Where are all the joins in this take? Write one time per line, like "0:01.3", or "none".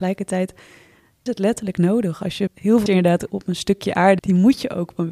0:01.3
0:02.5
0:02.9
0:03.3
0:04.2